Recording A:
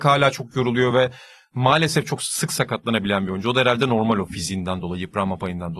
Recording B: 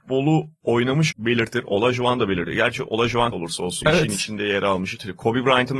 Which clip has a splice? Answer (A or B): B